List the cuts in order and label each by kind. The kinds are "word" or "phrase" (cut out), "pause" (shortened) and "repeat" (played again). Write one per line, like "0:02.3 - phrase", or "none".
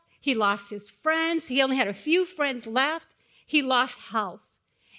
0:04.0 - word